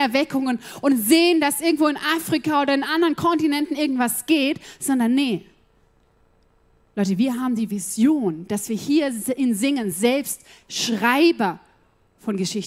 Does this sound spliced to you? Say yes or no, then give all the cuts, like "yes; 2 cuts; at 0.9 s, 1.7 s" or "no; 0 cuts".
no; 0 cuts